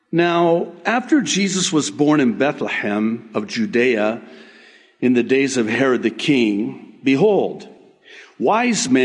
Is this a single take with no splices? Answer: yes; 0 cuts

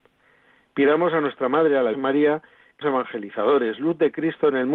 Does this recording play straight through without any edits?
no; 2 cuts; at 1.9 s, 2.8 s

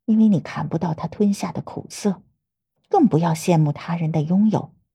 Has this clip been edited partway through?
no; 0 cuts

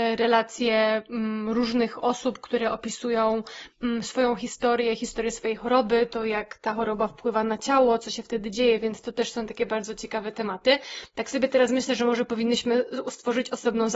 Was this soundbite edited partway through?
no; 0 cuts

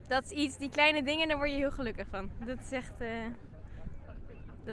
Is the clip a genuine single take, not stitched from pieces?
yes; 0 cuts

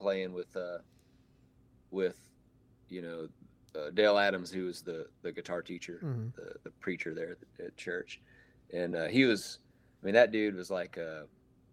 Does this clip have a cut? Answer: no; 0 cuts

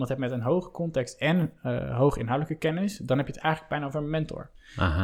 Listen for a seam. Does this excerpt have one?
no; 0 cuts

